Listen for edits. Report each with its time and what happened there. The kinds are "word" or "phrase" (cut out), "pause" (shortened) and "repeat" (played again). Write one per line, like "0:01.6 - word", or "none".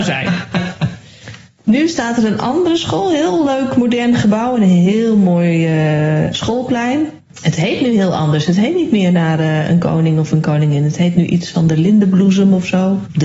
none

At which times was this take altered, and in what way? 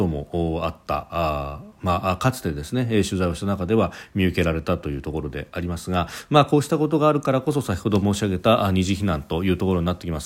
none

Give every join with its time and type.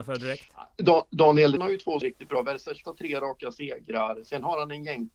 0:01.6 - word
0:02.0 - word
0:02.8 - word

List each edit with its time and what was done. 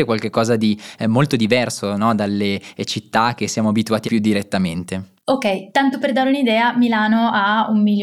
0:04.0 - phrase

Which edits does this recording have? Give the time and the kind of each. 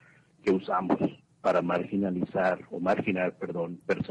0:01.2 - pause

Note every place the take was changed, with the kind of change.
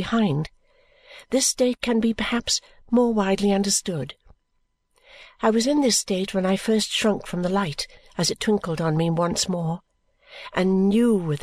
none

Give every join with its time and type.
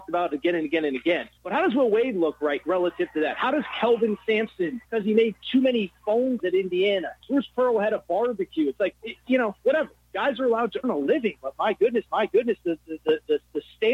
0:01.4 - pause
0:02.6 - word
0:04.8 - pause
0:06.4 - word
0:07.2 - pause
0:08.9 - word
0:10.8 - word
0:12.1 - repeat

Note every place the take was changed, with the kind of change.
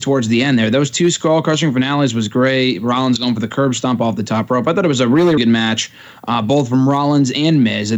0:05.4 - word

